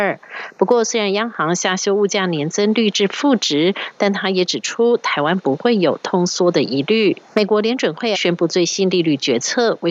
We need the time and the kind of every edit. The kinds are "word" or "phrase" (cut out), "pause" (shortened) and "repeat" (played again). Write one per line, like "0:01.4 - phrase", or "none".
0:07.3 - pause
0:08.1 - word